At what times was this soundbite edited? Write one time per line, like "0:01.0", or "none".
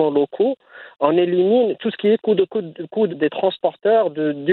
0:02.4
0:03.1